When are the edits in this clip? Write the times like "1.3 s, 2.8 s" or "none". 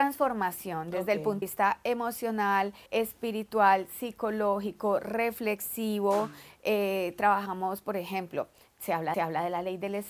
1.4 s, 2.9 s, 9.1 s